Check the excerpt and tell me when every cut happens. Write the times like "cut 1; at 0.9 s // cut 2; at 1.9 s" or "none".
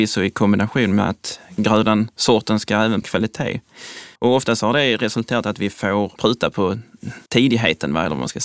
cut 1; at 3.0 s // cut 2; at 4.2 s // cut 3; at 6.2 s // cut 4; at 7.3 s